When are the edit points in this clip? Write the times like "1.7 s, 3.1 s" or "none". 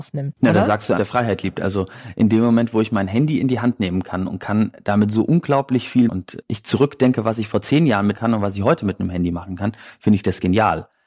1.0 s, 6.1 s, 8.1 s